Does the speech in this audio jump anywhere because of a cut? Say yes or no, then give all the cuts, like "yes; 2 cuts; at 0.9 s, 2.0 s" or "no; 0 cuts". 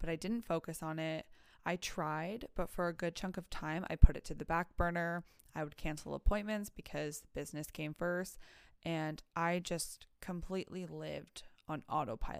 no; 0 cuts